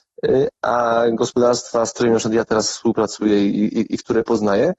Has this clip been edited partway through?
no; 0 cuts

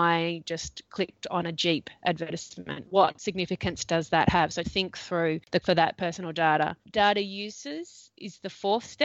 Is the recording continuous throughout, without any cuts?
no; 2 cuts; at 4.6 s, 5.6 s

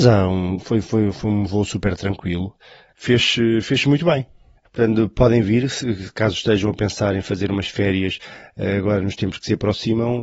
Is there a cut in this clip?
no; 0 cuts

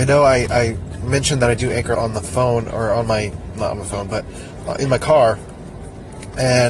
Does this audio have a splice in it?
yes; 1 cut; at 1.9 s

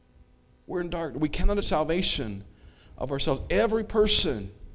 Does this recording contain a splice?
yes; 1 cut; at 1.6 s

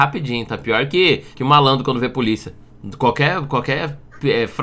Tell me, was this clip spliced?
yes; 1 cut; at 1.3 s

